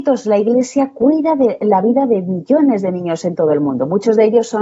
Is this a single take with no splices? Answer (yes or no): yes